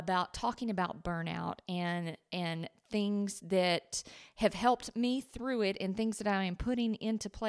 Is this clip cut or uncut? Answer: uncut